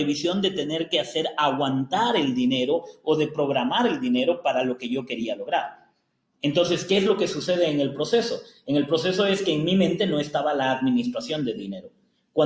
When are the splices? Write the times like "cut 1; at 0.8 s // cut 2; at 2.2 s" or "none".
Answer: none

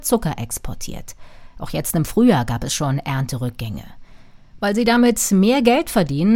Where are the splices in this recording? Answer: none

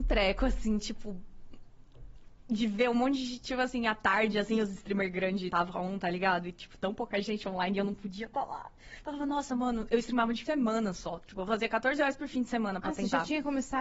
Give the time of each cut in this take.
cut 1; at 5.5 s // cut 2; at 10.5 s

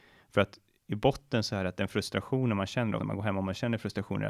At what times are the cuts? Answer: cut 1; at 3.0 s

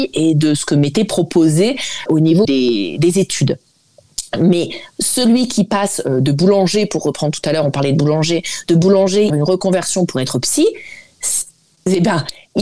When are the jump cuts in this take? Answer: cut 1; at 2.1 s // cut 2; at 2.4 s // cut 3; at 9.3 s

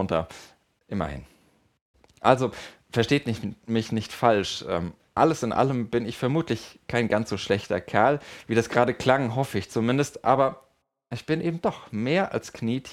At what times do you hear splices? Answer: none

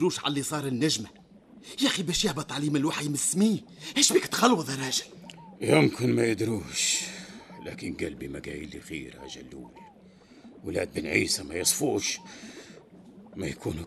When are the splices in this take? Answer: none

